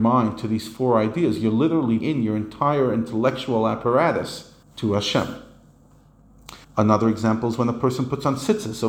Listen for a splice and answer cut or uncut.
cut